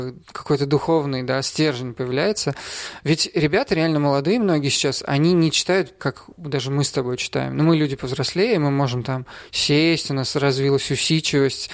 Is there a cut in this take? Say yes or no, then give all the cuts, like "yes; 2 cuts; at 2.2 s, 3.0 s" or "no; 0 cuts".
yes; 1 cut; at 6.0 s